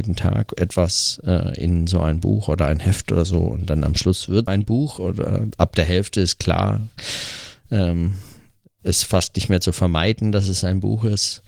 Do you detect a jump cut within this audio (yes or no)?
yes